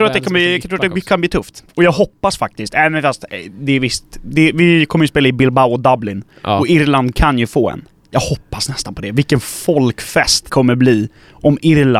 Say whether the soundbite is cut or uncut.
cut